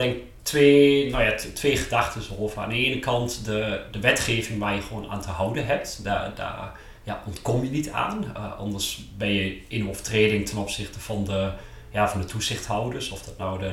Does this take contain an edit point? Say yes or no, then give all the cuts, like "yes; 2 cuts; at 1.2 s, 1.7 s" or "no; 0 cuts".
no; 0 cuts